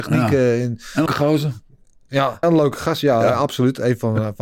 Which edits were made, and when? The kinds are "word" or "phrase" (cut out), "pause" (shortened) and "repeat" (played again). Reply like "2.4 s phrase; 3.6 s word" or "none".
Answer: 1.1 s word; 2.4 s word